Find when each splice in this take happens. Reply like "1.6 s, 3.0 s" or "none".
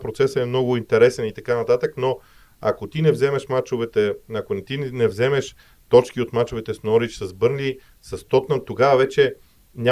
none

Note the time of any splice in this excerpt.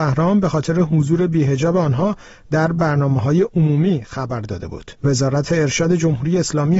5.0 s

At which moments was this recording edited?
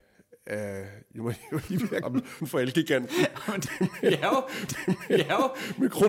1.7 s, 2.0 s, 2.4 s, 4.7 s

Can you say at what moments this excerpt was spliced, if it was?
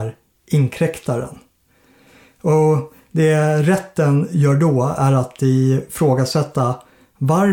none

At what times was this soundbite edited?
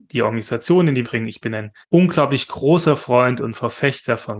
1.0 s, 1.8 s

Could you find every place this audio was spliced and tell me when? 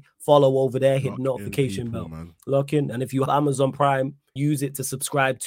3.3 s, 4.4 s

